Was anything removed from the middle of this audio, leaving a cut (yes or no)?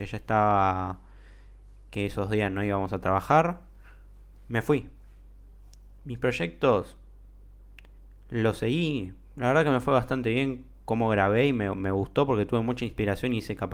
yes